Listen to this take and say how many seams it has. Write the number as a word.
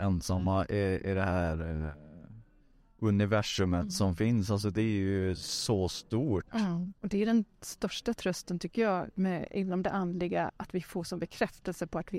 two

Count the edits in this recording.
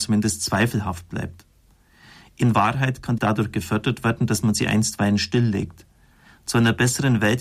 one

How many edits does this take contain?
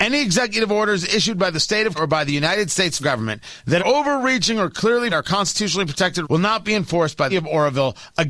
six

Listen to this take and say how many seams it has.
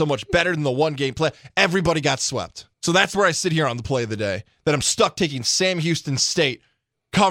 one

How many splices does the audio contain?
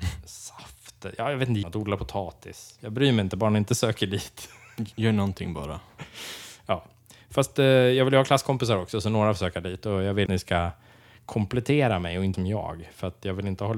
three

